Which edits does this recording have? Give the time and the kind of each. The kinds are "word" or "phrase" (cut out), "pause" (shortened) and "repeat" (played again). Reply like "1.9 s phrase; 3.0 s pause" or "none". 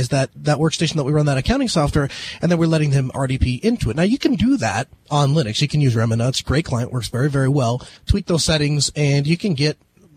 8.0 s pause